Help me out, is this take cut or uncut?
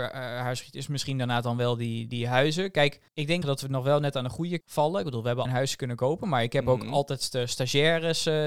cut